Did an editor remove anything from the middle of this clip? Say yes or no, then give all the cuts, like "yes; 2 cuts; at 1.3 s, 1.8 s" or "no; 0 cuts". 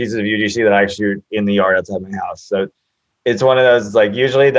no; 0 cuts